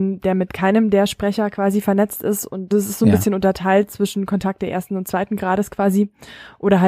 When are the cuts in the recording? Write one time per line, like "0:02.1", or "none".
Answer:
0:02.7